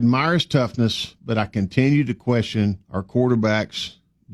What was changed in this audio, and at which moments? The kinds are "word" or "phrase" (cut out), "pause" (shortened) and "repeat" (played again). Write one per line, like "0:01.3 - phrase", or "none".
0:02.8 - pause